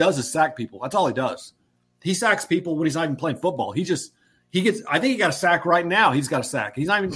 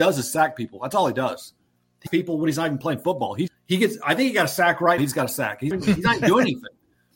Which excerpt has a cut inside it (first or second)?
second